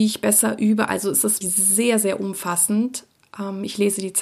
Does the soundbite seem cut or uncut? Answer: cut